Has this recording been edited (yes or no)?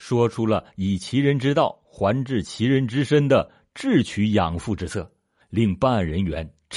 no